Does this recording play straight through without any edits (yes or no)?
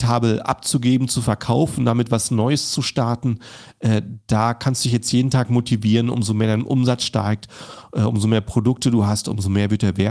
yes